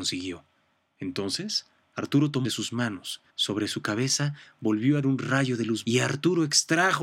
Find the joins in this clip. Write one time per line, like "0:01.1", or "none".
0:02.4
0:03.3
0:05.0
0:05.8